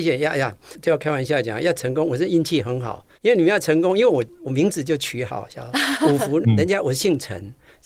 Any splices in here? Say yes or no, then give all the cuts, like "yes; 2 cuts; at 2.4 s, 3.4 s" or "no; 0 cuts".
yes; 2 cuts; at 3.1 s, 6.4 s